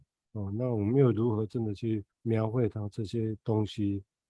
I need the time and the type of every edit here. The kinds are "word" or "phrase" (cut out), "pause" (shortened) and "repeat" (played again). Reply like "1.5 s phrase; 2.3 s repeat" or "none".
2.1 s pause